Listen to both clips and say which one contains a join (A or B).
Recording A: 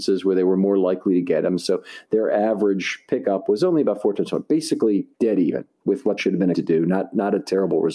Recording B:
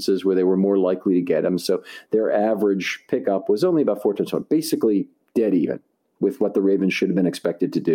A